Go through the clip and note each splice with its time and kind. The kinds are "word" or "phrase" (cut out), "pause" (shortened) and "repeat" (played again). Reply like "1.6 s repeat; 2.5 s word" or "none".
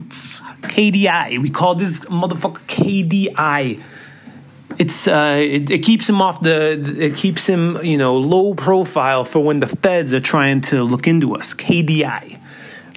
none

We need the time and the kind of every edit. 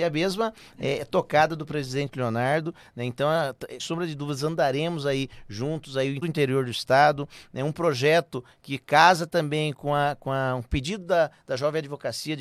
3.8 s word; 6.2 s word

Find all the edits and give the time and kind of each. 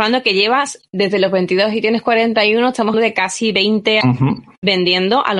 2.9 s word; 4.0 s word

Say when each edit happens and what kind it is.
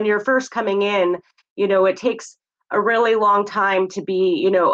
none

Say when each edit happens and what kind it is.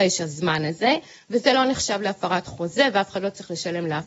none

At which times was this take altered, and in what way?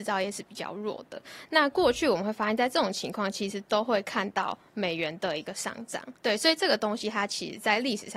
6.2 s pause

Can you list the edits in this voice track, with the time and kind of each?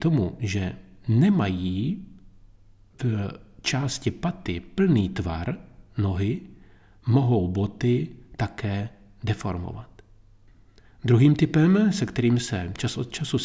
none

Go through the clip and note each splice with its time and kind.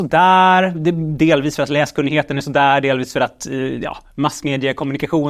none

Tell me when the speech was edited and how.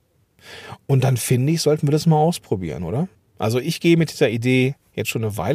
3.1 s pause

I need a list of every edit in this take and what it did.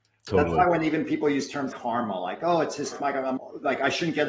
1.7 s word; 2.9 s word; 3.4 s word

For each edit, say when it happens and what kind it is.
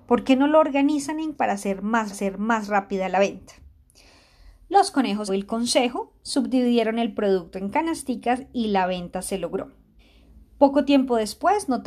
1.3 s word; 2.1 s repeat; 5.3 s word; 10.0 s pause

